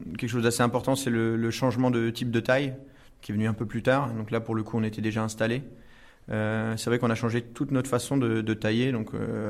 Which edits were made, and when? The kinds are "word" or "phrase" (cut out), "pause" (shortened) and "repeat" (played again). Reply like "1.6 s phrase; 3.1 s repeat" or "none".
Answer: none